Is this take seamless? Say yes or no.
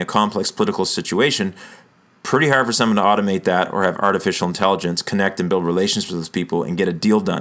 yes